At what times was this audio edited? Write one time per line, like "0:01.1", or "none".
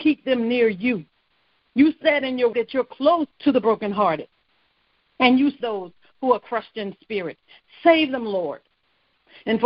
0:02.5
0:03.3
0:05.6